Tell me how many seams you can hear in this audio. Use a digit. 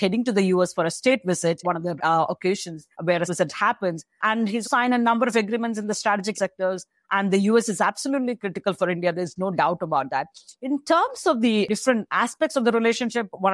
7